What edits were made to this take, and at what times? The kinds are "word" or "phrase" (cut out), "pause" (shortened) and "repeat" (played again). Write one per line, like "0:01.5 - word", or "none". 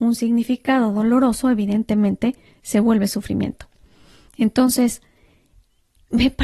none